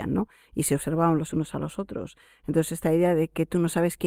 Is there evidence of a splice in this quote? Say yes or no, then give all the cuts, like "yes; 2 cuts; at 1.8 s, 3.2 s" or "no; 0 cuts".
no; 0 cuts